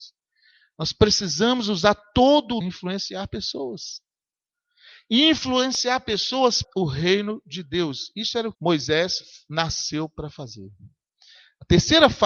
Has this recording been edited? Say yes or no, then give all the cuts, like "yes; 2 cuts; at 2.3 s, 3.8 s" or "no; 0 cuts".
yes; 3 cuts; at 2.6 s, 6.6 s, 8.5 s